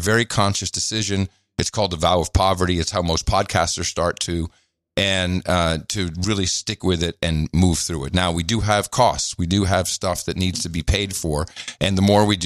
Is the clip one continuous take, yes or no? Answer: yes